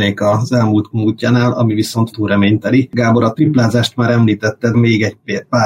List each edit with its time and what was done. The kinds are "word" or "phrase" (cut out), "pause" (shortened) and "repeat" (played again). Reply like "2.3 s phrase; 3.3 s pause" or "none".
0.9 s phrase; 2.1 s phrase; 4.7 s word